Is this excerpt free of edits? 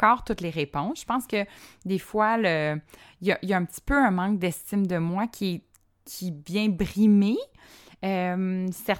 yes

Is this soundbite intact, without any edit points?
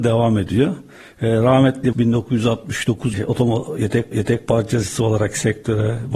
no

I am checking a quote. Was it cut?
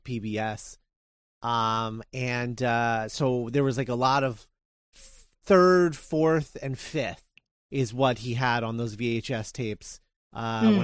no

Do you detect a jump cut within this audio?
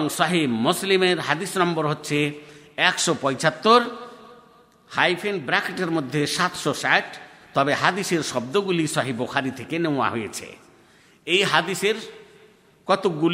no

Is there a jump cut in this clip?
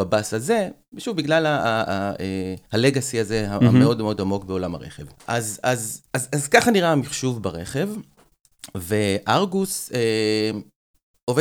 yes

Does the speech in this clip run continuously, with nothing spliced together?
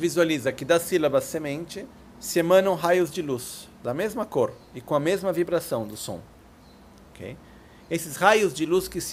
yes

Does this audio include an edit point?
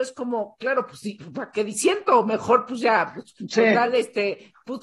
no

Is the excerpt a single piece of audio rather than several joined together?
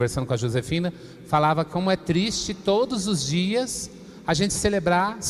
yes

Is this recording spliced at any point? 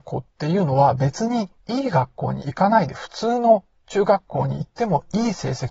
yes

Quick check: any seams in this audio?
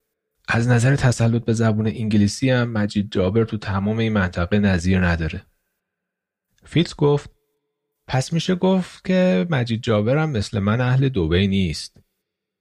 no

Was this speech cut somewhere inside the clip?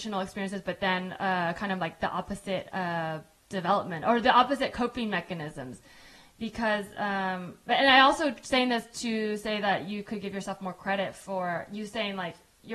no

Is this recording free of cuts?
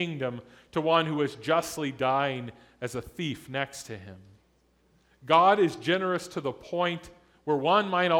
yes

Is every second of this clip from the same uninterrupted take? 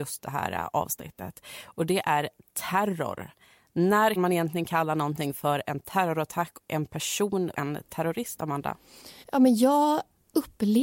no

